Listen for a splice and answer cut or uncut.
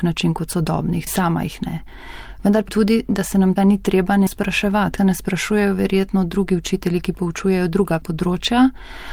cut